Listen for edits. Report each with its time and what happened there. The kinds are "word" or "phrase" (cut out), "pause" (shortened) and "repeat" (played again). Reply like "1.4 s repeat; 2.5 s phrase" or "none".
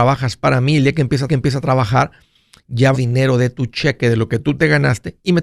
1.3 s repeat; 2.9 s phrase